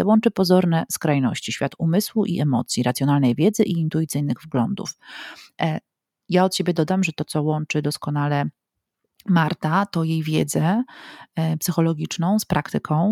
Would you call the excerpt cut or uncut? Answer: uncut